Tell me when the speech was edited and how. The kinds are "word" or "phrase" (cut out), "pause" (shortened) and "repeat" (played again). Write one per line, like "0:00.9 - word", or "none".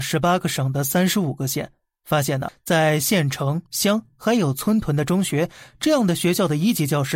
0:02.5 - word
0:03.7 - word